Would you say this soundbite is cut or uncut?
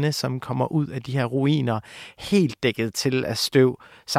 uncut